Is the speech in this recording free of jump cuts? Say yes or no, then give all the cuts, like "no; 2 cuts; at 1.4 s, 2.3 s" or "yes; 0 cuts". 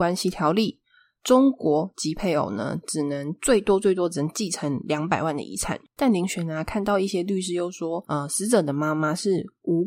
yes; 0 cuts